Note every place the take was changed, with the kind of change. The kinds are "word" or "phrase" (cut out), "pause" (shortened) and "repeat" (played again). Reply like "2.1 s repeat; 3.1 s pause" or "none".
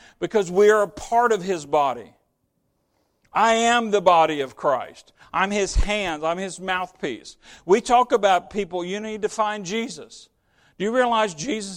none